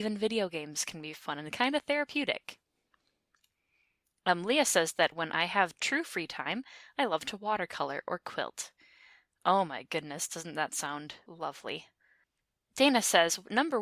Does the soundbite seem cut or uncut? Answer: uncut